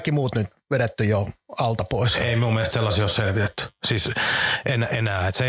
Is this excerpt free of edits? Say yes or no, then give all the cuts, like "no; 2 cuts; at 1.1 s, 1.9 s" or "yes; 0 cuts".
yes; 0 cuts